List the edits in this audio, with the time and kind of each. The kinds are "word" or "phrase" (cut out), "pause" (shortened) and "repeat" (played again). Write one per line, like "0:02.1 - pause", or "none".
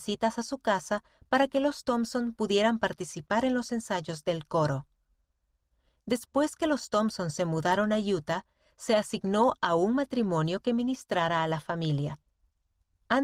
none